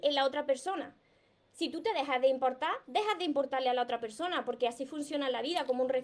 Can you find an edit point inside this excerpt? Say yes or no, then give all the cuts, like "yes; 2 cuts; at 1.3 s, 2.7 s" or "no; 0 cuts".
no; 0 cuts